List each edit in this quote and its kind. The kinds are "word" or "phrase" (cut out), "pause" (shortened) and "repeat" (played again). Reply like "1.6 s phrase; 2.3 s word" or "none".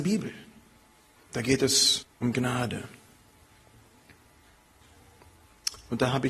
2.0 s word